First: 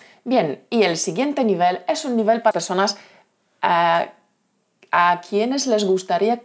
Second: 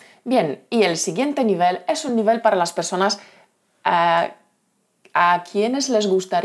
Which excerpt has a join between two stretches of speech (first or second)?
first